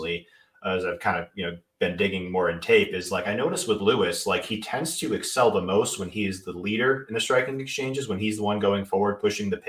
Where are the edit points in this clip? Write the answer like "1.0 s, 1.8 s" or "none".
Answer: 1.7 s